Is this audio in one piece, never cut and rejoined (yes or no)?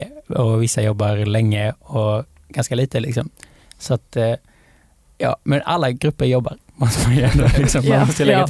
yes